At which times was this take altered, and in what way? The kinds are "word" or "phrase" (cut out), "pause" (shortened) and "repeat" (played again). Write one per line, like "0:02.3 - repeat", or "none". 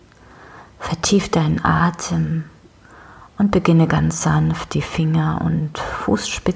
none